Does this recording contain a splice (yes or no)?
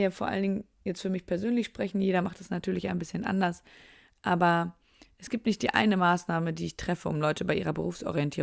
no